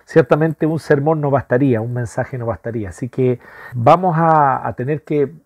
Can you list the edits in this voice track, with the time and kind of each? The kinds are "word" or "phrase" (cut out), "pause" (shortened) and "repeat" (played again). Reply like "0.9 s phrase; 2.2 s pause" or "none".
3.7 s word